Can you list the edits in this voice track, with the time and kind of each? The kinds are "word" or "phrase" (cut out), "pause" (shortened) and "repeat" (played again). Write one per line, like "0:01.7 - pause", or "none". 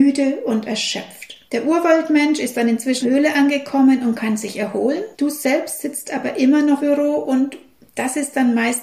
0:01.5 - pause
0:03.0 - phrase
0:05.1 - pause
0:06.8 - word